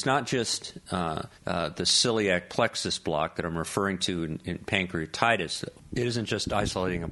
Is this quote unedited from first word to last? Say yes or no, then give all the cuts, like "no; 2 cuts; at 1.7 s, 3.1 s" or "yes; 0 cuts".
no; 1 cut; at 1.4 s